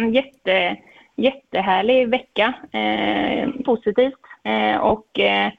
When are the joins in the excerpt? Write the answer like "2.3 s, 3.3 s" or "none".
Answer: 3.6 s, 4.4 s